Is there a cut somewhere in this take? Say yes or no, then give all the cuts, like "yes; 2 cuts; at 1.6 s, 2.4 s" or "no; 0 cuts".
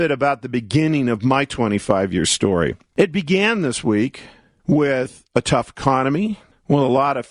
yes; 1 cut; at 2.9 s